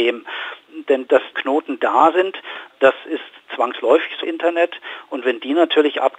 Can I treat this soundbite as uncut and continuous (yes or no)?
no